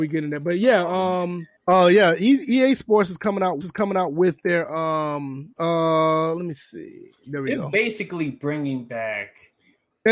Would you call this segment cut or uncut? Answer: cut